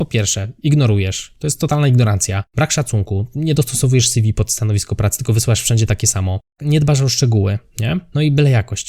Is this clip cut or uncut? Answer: uncut